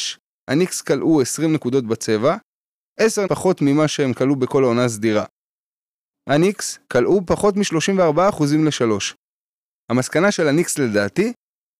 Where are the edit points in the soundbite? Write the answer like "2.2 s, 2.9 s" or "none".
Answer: 3.3 s, 6.9 s